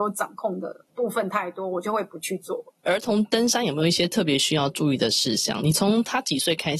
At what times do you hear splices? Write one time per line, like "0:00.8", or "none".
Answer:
0:02.8